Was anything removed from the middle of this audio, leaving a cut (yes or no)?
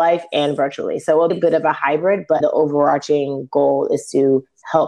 yes